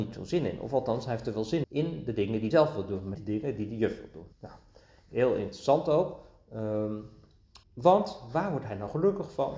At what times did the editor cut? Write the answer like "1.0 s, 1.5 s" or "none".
1.6 s, 2.5 s, 3.1 s, 4.3 s, 7.6 s